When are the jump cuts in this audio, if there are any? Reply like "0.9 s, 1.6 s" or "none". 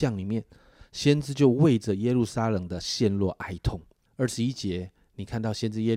4.1 s